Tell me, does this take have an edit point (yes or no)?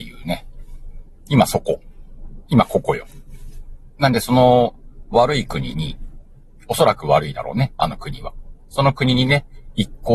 no